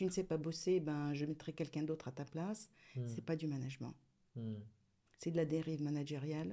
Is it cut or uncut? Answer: uncut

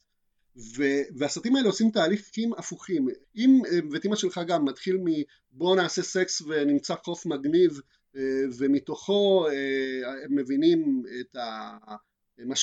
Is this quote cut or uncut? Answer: cut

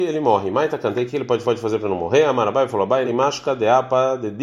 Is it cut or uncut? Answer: cut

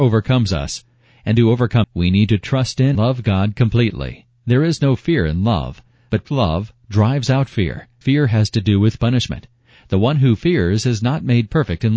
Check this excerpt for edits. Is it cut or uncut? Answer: cut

